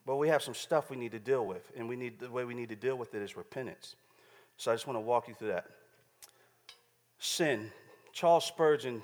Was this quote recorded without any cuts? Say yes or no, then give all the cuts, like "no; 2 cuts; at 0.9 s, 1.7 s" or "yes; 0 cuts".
yes; 0 cuts